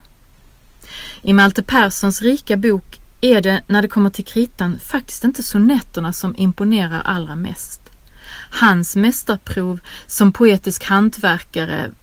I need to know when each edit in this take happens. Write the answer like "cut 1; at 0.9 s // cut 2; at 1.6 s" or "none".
none